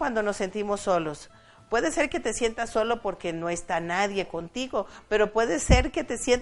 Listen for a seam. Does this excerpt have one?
no; 0 cuts

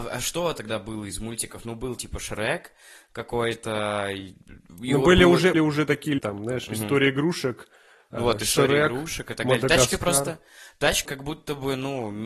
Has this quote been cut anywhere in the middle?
yes; 4 cuts; at 2.0 s, 5.5 s, 6.2 s, 11.1 s

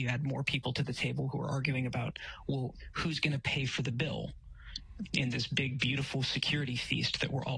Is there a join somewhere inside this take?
no; 0 cuts

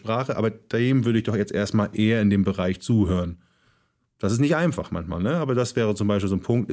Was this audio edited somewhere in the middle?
no; 0 cuts

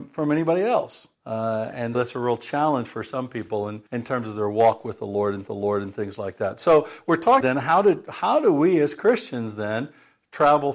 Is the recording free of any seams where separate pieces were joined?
no; 5 cuts; at 1.1 s, 1.9 s, 3.9 s, 5.5 s, 7.4 s

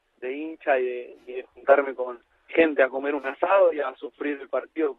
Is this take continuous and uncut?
no; 1 cut; at 2.5 s

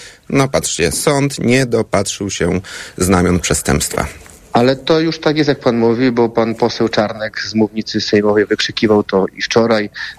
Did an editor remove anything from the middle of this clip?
no; 0 cuts

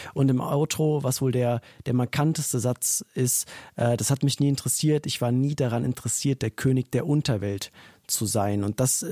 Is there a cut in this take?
no; 0 cuts

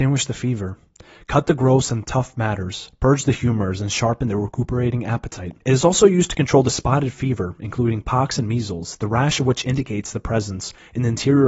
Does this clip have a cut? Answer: yes; 1 cut; at 5.6 s

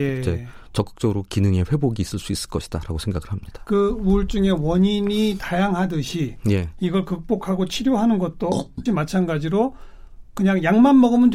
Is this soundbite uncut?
no; 1 cut; at 8.9 s

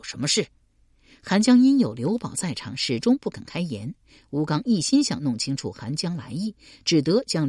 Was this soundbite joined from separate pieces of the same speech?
no; 0 cuts

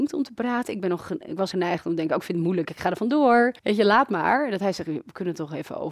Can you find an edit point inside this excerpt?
yes; 2 cuts; at 1.5 s, 3.6 s

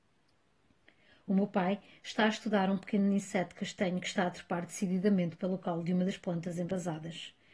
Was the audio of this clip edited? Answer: no; 0 cuts

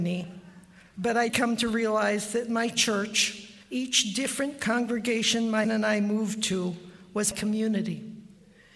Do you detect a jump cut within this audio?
yes; 4 cuts; at 1.3 s, 3.6 s, 5.6 s, 7.3 s

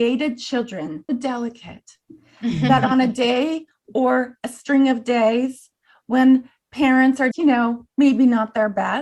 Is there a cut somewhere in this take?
yes; 2 cuts; at 1.1 s, 7.3 s

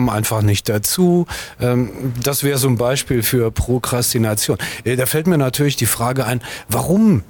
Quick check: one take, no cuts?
yes; 0 cuts

